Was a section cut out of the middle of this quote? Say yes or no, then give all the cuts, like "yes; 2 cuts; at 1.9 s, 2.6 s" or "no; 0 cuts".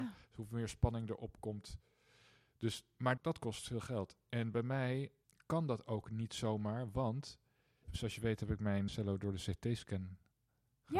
yes; 4 cuts; at 3.2 s, 5.2 s, 7.8 s, 8.9 s